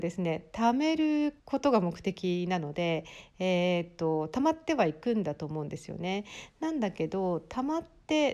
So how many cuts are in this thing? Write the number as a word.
one